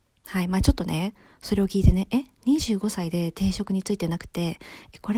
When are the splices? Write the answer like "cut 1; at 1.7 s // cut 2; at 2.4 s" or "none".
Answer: none

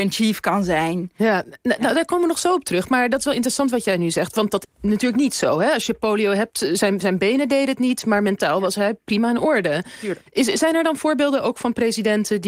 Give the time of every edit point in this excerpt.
cut 1; at 4.6 s // cut 2; at 10.3 s

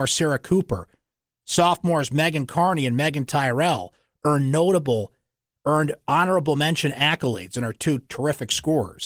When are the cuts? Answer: none

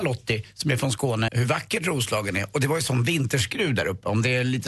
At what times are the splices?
cut 1; at 1.3 s

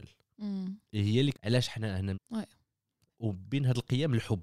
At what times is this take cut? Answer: cut 1; at 1.3 s // cut 2; at 2.1 s

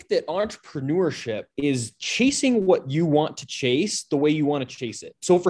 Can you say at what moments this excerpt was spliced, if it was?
cut 1; at 1.5 s

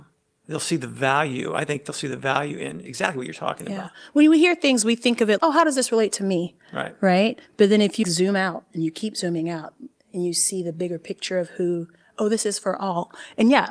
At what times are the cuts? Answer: cut 1; at 2.9 s // cut 2; at 5.4 s // cut 3; at 8.0 s

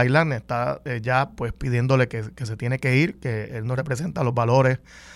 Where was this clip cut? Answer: none

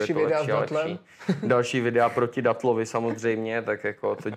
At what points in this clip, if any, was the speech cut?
none

